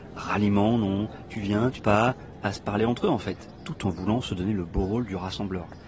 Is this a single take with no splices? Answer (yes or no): no